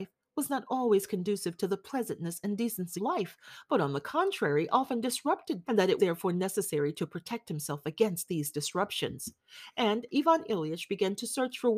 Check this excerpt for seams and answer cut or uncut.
cut